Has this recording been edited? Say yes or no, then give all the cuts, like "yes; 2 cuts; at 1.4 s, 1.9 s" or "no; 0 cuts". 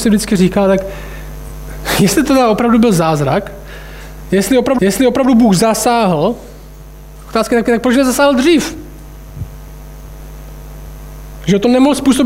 yes; 2 cuts; at 4.8 s, 7.6 s